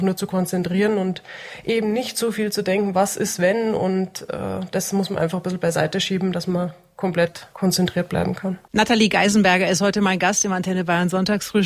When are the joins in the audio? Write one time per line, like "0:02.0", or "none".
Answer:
0:07.5